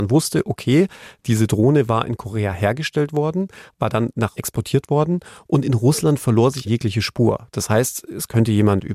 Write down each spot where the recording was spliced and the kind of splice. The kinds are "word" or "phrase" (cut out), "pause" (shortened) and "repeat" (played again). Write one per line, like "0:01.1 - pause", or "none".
0:04.4 - word
0:06.6 - word